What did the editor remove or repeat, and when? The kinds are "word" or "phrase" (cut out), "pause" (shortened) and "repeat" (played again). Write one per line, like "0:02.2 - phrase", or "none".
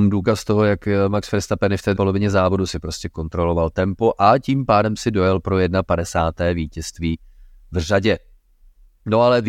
0:02.0 - word